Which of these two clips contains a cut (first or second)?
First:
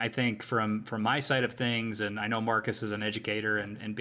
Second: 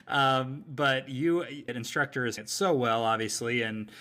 second